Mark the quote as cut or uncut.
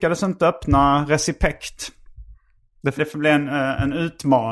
cut